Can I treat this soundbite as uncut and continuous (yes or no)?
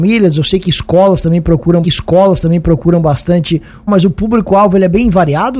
no